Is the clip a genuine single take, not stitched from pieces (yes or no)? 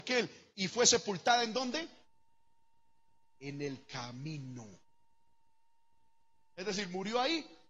yes